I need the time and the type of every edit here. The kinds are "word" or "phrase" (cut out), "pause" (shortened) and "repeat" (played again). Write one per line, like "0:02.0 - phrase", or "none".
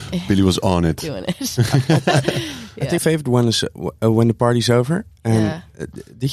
0:03.0 - word